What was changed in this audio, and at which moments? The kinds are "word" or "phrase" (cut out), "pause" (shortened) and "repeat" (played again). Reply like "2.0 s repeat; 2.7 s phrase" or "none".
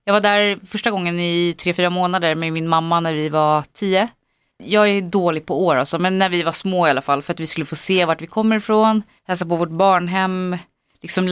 none